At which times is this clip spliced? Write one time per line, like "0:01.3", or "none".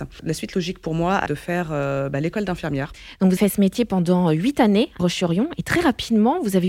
0:01.3
0:03.4
0:05.0